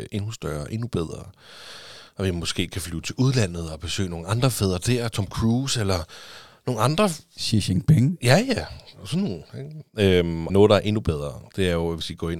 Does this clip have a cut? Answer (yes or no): yes